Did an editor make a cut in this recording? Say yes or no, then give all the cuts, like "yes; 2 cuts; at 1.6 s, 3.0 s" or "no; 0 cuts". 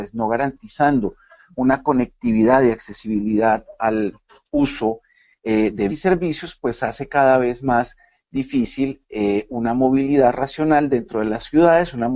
yes; 1 cut; at 5.9 s